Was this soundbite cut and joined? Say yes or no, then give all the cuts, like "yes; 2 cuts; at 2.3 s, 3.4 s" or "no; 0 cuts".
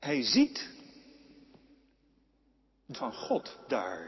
yes; 1 cut; at 2.9 s